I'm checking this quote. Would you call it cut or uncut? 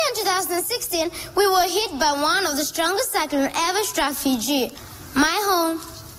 uncut